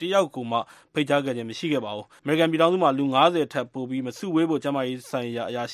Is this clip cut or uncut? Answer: cut